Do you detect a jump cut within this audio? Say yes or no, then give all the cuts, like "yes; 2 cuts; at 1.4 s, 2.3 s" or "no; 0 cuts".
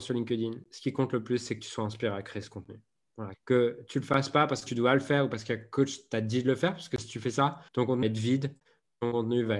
yes; 4 cuts; at 3.3 s, 4.7 s, 7.7 s, 8.0 s